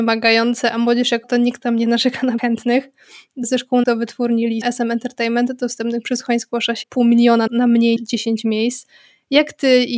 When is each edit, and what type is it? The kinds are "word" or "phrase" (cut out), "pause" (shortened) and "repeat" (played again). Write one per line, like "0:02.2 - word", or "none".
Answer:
0:01.2 - word
0:02.4 - word
0:03.4 - word
0:03.8 - word
0:04.6 - word
0:06.8 - word
0:07.5 - word
0:08.0 - word

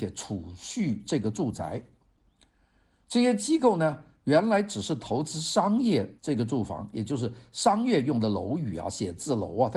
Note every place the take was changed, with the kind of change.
0:06.2 - pause

